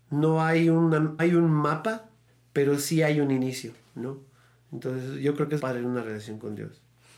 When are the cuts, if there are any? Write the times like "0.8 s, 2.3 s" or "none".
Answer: 1.2 s, 2.3 s, 5.6 s